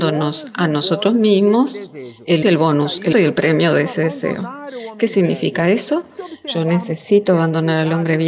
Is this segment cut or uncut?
cut